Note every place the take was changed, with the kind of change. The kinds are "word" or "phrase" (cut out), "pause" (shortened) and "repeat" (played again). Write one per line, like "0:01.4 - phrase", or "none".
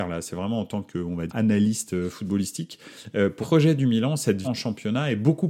0:01.3 - word
0:03.4 - word
0:04.4 - word